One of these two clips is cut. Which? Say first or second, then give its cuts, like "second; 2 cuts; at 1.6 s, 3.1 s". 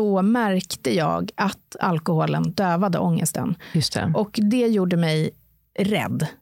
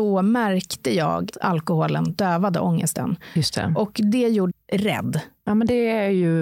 second; 2 cuts; at 1.3 s, 4.5 s